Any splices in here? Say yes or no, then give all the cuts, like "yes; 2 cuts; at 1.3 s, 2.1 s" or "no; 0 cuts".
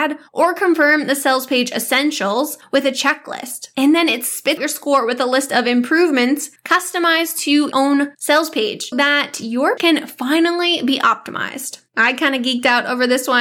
yes; 4 cuts; at 4.6 s, 7.7 s, 8.9 s, 9.8 s